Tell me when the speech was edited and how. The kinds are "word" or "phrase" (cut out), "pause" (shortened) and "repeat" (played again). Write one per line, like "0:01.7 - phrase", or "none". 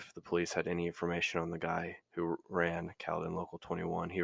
0:02.0 - pause

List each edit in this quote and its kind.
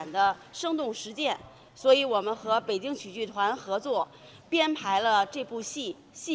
0:04.4 - pause

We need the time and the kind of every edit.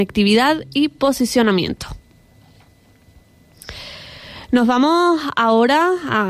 none

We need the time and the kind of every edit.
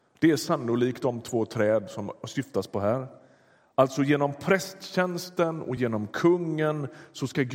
none

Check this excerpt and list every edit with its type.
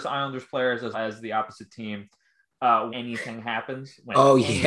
0:00.9 - word
0:02.9 - word

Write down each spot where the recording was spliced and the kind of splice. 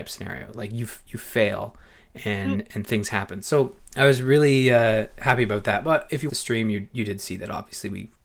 0:03.8 - pause
0:06.3 - word

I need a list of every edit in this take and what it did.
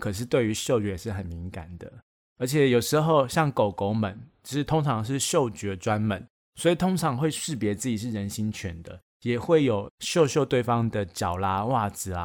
0:09.9 - pause

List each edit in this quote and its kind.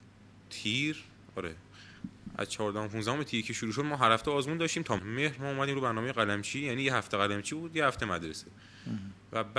0:05.0 - word

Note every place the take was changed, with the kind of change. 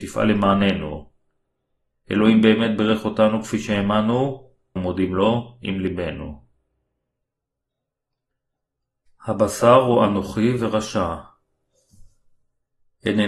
0:04.8 - word

